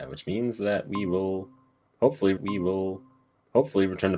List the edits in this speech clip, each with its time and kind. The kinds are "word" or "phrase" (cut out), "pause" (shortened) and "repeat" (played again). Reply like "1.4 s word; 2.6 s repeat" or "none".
2.4 s repeat